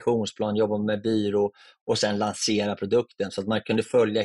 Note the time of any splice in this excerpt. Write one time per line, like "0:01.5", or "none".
none